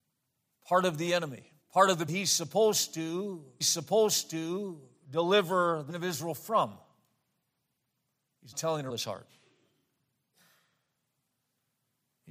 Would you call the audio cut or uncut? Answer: cut